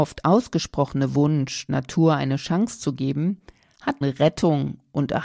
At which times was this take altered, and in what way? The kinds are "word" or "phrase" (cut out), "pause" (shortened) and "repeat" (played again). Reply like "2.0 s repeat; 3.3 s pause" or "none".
1.7 s word; 4.0 s word

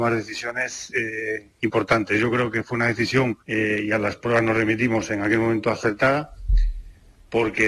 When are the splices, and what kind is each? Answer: 3.4 s pause

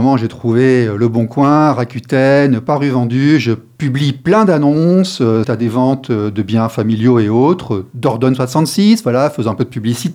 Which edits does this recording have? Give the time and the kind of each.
5.4 s word

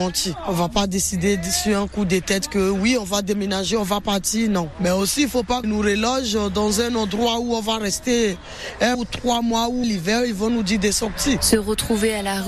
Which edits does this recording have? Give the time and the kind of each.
5.6 s word; 8.9 s word; 9.8 s word

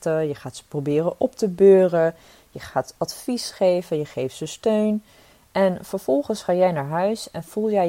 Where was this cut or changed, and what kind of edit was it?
none

